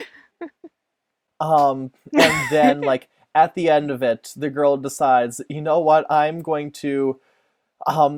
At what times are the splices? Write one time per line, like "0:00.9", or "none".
none

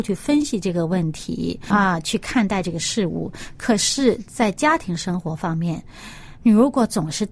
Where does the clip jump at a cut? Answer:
0:01.7

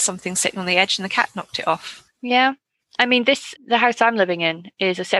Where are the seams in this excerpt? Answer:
0:02.1
0:03.6

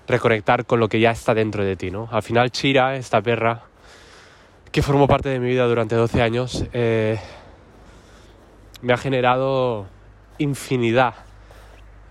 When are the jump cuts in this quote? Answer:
none

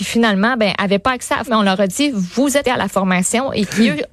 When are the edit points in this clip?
0:01.5
0:02.6

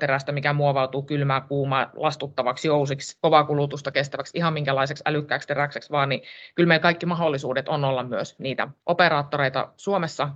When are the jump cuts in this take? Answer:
0:08.8

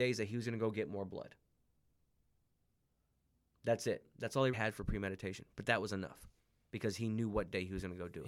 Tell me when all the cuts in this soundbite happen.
0:04.5

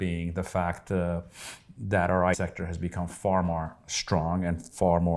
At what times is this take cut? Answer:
0:02.3

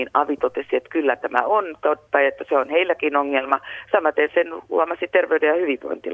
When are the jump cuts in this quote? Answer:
none

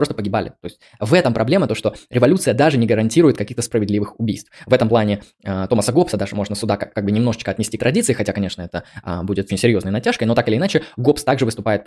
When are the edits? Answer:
0:07.8
0:09.5

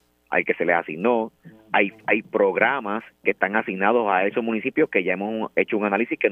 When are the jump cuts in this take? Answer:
0:03.1

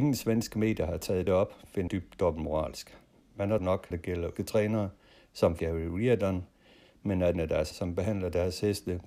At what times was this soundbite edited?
0:01.3
0:01.9
0:03.6
0:03.9
0:04.4
0:05.6
0:07.3
0:07.7

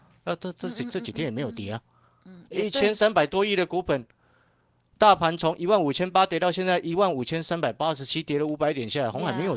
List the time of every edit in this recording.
none

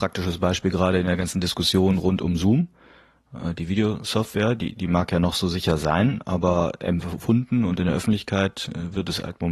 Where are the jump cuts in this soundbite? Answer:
none

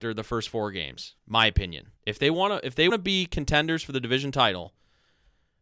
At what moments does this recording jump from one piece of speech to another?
0:01.2
0:02.0
0:02.9

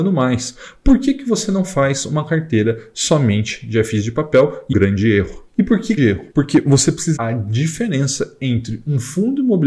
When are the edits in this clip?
0:04.7
0:05.5
0:06.0
0:06.3
0:07.2

